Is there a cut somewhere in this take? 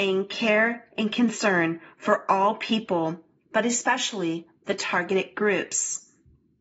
no; 0 cuts

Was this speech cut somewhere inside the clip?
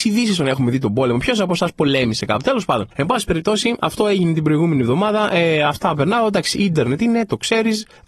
yes; 1 cut; at 2.9 s

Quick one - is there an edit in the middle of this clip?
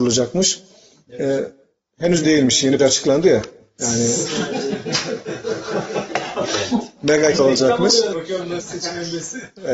yes; 6 cuts; at 2.2 s, 2.8 s, 6.4 s, 7.3 s, 8.1 s, 8.6 s

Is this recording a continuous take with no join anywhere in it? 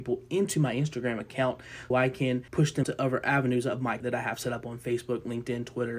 no; 4 cuts; at 1.9 s, 2.5 s, 2.8 s, 4.0 s

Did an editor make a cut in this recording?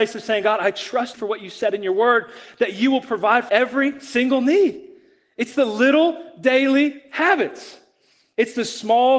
yes; 2 cuts; at 1.1 s, 3.5 s

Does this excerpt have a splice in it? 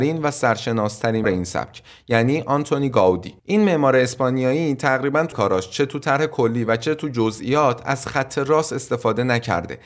yes; 3 cuts; at 1.2 s, 3.4 s, 5.3 s

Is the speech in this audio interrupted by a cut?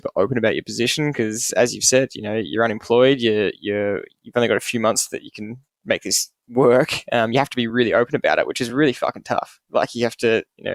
no; 0 cuts

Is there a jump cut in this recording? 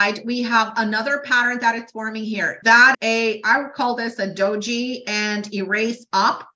yes; 2 cuts; at 2.6 s, 2.9 s

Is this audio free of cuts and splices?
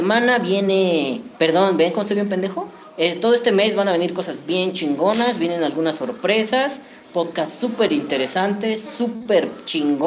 no; 1 cut; at 1.3 s

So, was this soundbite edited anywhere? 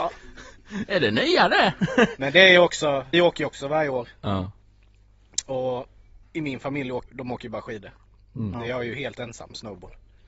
yes; 3 cuts; at 3.1 s, 6.2 s, 7.1 s

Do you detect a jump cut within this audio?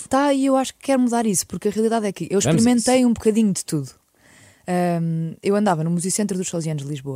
no; 0 cuts

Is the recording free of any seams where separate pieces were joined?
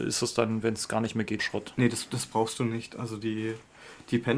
no; 1 cut; at 1.4 s

